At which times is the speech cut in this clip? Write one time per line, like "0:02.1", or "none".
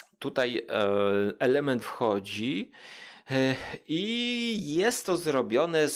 0:01.8